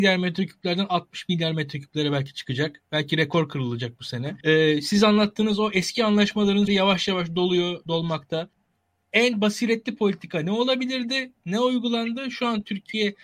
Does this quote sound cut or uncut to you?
cut